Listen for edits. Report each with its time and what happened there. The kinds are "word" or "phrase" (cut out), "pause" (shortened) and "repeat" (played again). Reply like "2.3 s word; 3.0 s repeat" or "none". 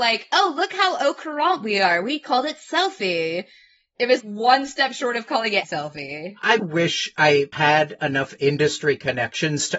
4.2 s word; 5.6 s word; 6.6 s word